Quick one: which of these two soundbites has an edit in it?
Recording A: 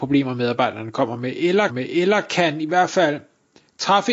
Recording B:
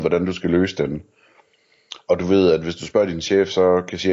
A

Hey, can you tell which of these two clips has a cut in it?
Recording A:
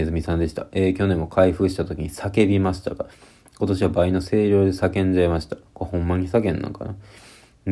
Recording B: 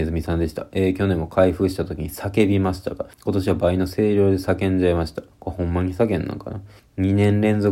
B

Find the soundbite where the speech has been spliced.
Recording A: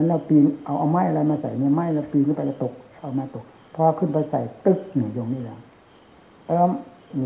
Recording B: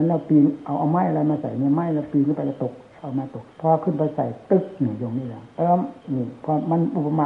B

